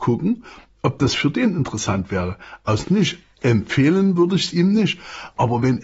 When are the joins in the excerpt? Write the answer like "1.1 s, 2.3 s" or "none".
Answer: 2.8 s